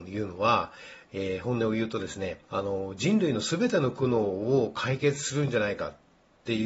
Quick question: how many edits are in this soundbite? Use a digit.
1